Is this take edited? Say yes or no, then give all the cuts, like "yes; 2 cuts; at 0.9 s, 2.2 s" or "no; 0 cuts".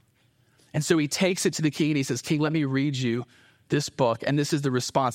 no; 0 cuts